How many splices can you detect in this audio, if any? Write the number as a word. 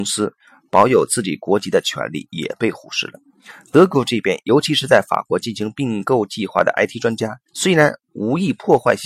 zero